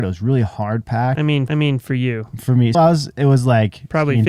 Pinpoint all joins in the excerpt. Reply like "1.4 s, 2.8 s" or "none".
1.5 s, 2.7 s